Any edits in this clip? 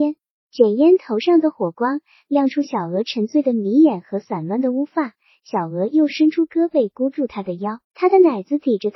yes; 1 cut; at 7.8 s

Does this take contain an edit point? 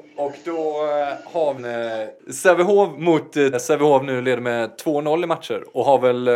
yes; 2 cuts; at 1.6 s, 3.5 s

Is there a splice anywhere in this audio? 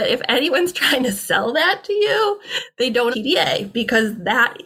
yes; 1 cut; at 3.1 s

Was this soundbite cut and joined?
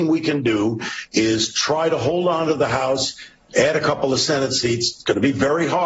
no; 0 cuts

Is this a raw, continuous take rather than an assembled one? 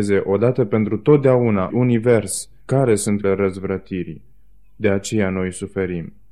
no; 4 cuts; at 1.7 s, 2.6 s, 3.2 s, 4.4 s

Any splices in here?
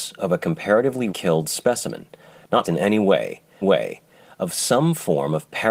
yes; 3 cuts; at 1.1 s, 2.6 s, 3.6 s

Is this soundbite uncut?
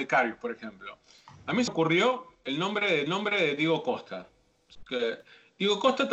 no; 3 cuts; at 1.7 s, 2.3 s, 3.1 s

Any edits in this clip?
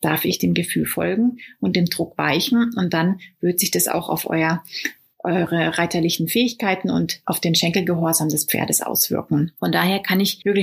no; 0 cuts

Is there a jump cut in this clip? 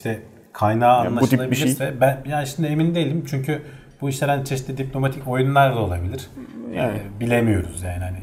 no; 0 cuts

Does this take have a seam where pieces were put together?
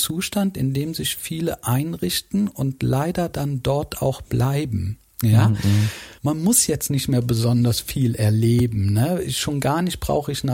yes; 1 cut; at 6.2 s

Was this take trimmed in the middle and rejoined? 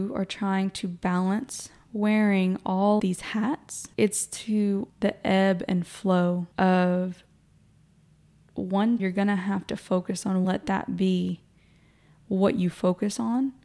yes; 6 cuts; at 3.0 s, 3.9 s, 4.9 s, 6.5 s, 9.0 s, 10.4 s

